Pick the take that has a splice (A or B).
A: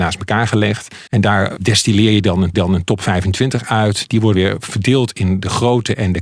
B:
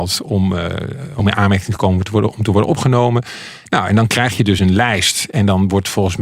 A